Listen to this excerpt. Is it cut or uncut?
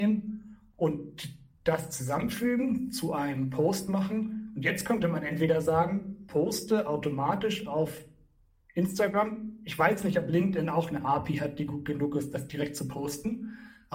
uncut